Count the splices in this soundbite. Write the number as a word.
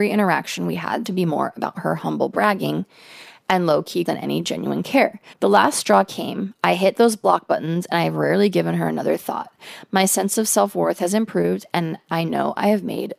three